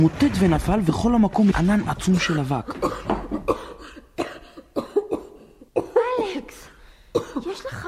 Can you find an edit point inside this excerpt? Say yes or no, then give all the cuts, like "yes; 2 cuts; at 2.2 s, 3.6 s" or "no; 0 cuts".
yes; 2 cuts; at 1.5 s, 5.7 s